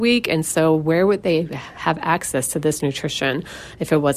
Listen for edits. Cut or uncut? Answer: uncut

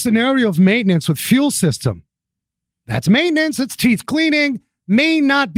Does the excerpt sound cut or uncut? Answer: uncut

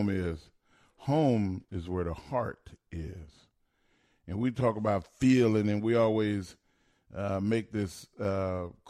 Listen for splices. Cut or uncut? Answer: uncut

